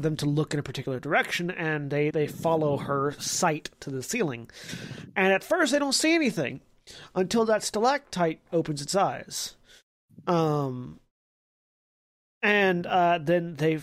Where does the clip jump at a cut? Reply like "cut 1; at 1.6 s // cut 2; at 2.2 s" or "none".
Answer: cut 1; at 2.1 s